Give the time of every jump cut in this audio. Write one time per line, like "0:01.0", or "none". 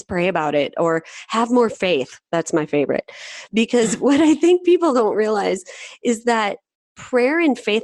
none